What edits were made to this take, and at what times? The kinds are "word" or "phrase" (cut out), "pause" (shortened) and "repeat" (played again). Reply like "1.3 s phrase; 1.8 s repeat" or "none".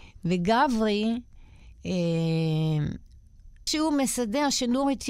3.7 s word